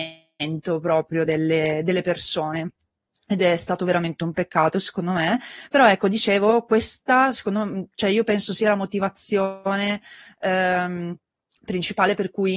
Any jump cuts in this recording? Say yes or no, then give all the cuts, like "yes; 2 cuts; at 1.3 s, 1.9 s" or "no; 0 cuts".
no; 0 cuts